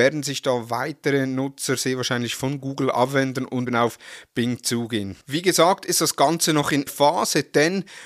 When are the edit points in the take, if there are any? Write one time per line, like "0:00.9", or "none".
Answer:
0:03.7
0:05.2
0:06.9